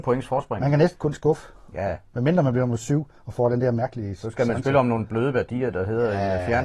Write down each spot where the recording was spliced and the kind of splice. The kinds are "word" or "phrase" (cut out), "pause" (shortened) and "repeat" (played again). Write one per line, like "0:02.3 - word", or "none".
none